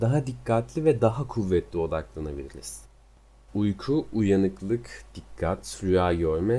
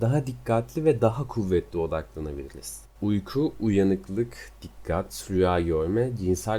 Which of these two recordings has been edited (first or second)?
second